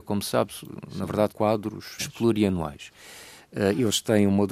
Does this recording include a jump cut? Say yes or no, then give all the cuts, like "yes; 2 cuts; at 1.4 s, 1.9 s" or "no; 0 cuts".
yes; 2 cuts; at 1.3 s, 2.0 s